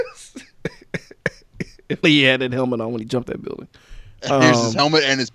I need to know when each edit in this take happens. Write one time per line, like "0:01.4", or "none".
0:02.0
0:03.3